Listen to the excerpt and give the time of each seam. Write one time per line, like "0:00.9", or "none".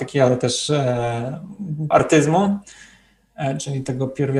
0:01.9